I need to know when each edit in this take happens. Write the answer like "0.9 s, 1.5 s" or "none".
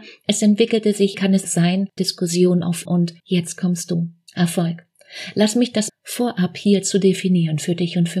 1.1 s, 1.5 s, 2.0 s, 2.9 s, 3.2 s, 4.3 s, 5.9 s